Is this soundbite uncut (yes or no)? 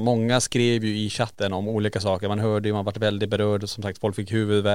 yes